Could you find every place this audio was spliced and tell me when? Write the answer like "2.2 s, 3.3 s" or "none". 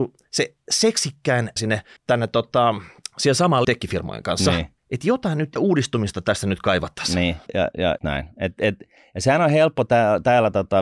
1.6 s, 2.0 s, 3.0 s, 3.6 s, 4.8 s, 5.6 s, 7.5 s, 8.0 s